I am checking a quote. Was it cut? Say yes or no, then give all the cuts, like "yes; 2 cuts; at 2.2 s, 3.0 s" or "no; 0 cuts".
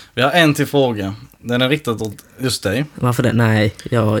no; 0 cuts